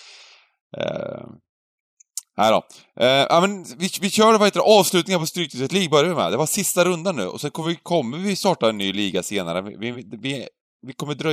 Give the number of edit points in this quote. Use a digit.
0